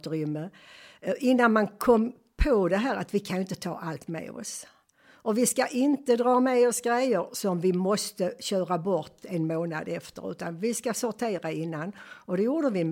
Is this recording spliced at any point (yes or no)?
no